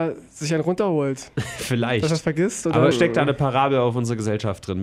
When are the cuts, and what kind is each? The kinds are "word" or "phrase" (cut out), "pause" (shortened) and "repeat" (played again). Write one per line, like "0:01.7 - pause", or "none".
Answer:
0:02.9 - word